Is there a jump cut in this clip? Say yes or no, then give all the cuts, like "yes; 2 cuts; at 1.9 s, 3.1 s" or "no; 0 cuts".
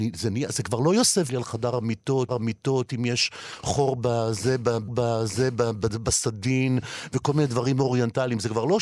yes; 3 cuts; at 1.3 s, 2.3 s, 4.9 s